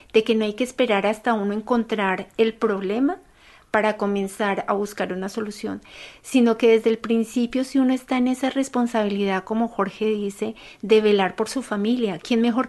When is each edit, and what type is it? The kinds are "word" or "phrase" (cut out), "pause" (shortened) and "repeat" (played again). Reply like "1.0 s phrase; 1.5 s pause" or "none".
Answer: none